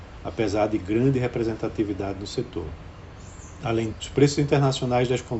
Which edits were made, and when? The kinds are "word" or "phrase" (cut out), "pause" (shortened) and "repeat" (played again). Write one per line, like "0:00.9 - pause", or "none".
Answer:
0:03.9 - word